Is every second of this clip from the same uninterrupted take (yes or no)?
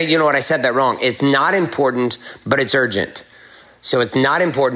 yes